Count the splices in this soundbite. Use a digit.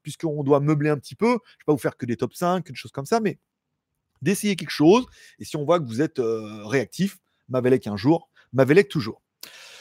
0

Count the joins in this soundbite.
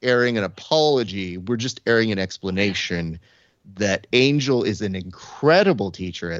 0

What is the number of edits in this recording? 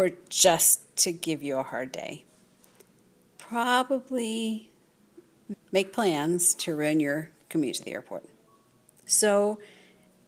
1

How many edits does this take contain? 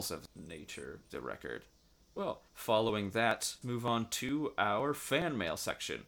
3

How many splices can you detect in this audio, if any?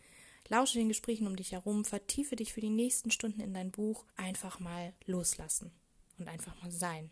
2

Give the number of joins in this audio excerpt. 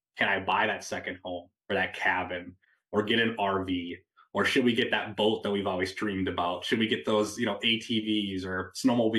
0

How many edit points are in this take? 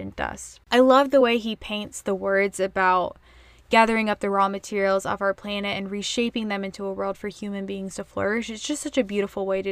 0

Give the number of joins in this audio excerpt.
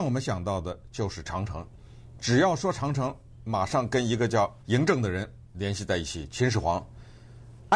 2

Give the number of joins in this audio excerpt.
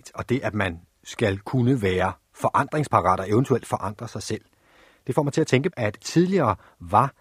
1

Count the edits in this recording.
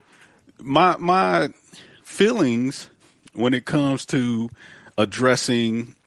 0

